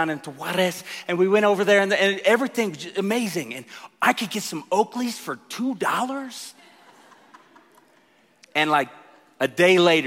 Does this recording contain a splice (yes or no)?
no